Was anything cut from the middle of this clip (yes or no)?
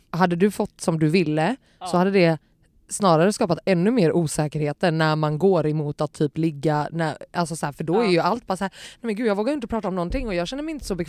no